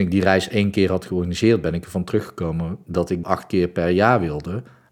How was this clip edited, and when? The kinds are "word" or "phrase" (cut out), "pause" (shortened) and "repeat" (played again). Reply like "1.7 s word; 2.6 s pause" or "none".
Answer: 3.2 s word